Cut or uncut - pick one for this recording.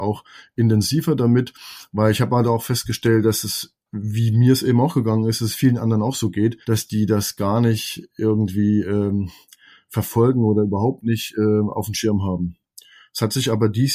cut